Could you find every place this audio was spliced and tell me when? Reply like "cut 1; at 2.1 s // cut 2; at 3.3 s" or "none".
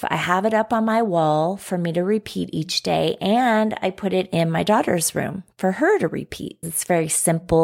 cut 1; at 6.6 s